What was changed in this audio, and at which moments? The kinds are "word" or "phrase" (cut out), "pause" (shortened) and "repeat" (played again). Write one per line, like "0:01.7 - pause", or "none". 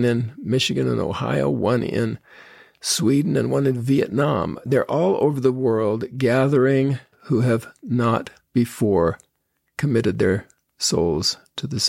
0:07.1 - word